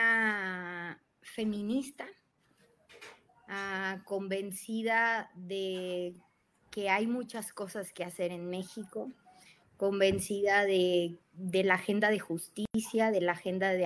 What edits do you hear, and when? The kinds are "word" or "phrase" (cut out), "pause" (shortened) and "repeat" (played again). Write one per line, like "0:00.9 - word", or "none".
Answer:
0:11.2 - pause